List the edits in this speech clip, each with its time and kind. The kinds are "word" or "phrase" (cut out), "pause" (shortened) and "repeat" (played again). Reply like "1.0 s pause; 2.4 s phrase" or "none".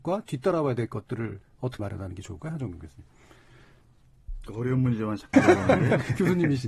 1.8 s word; 5.3 s word